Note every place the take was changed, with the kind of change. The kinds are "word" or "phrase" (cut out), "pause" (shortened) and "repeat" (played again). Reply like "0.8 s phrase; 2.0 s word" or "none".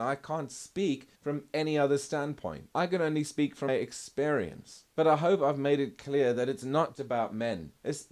1.2 s pause; 3.7 s word; 6.9 s word